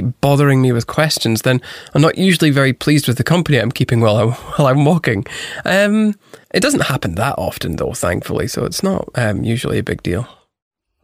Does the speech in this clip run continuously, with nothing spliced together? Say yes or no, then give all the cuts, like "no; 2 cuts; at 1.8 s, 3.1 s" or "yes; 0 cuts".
no; 1 cut; at 6.4 s